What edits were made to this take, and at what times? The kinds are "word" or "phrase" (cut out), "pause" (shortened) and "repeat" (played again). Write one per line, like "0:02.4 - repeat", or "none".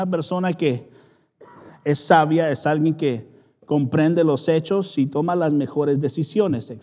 none